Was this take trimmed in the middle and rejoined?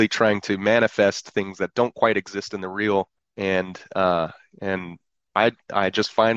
yes; 1 cut; at 3.2 s

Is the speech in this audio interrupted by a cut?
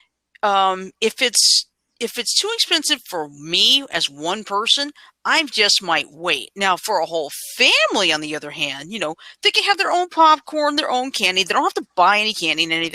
no; 0 cuts

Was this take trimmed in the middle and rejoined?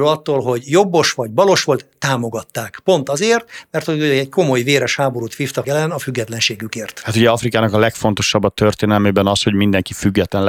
yes; 1 cut; at 5.6 s

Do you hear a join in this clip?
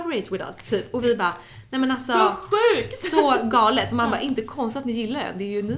no; 0 cuts

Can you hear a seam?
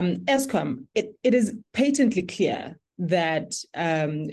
yes; 1 cut; at 1.6 s

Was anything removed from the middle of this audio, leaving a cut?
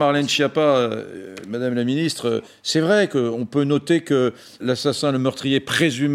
yes; 1 cut; at 4.6 s

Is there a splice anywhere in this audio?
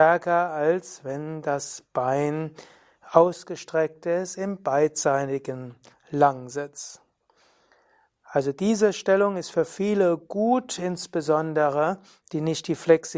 no; 0 cuts

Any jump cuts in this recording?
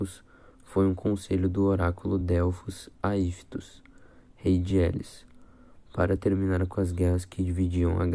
no; 0 cuts

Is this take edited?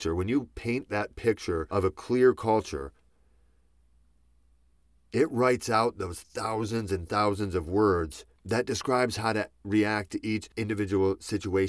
no; 0 cuts

